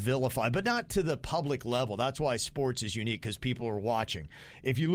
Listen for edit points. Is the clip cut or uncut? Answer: uncut